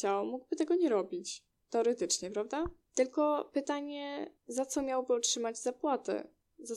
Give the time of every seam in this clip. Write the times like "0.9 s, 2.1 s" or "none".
4.4 s